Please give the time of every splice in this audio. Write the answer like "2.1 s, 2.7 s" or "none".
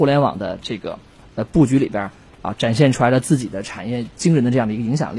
none